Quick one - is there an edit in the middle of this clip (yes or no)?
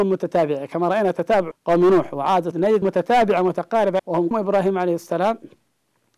yes